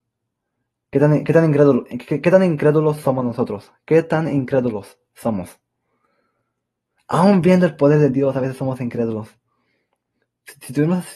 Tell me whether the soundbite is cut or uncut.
uncut